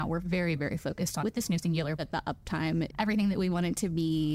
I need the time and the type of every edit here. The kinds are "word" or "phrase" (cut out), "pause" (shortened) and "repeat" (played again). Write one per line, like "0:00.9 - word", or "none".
0:01.2 - word
0:02.0 - word
0:02.9 - word